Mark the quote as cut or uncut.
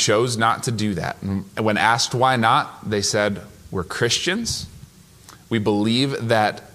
uncut